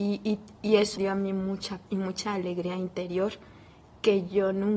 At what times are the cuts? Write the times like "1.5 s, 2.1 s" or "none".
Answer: 1.0 s, 1.9 s